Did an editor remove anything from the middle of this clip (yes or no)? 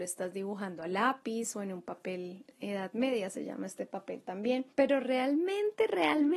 yes